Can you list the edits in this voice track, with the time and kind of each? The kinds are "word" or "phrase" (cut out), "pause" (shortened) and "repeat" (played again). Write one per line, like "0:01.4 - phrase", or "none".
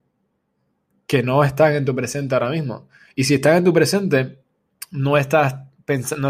none